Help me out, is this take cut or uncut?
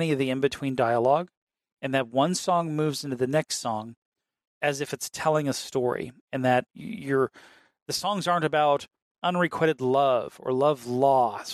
uncut